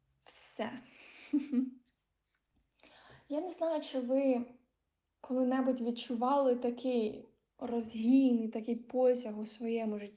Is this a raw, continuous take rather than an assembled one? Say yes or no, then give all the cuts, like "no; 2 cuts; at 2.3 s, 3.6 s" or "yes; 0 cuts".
yes; 0 cuts